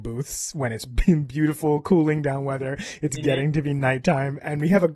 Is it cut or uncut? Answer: uncut